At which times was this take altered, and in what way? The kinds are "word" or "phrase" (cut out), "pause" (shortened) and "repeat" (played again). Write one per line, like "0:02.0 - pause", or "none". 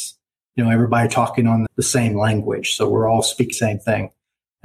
0:01.7 - word
0:03.5 - word